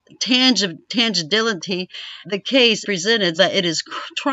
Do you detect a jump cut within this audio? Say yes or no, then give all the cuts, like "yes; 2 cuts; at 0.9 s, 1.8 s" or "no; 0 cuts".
yes; 3 cuts; at 2.2 s, 2.8 s, 3.4 s